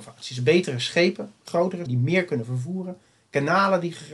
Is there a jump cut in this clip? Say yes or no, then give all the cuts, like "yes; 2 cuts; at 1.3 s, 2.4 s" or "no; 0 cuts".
yes; 1 cut; at 1.9 s